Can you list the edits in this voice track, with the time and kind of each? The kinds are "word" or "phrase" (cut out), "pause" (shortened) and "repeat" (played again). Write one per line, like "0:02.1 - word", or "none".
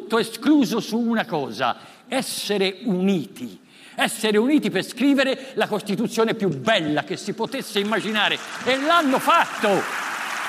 none

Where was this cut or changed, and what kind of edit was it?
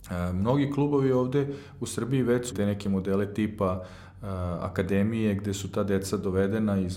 0:02.5 - word

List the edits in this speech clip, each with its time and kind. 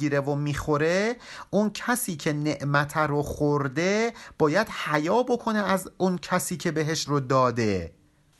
0:07.0 - word

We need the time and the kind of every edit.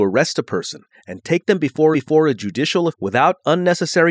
0:01.9 - repeat
0:02.9 - word

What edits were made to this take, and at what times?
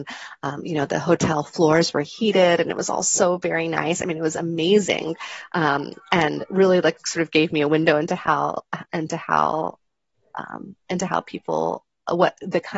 none

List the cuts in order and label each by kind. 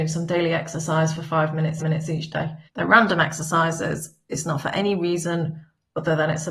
0:01.8 - repeat
0:02.7 - pause

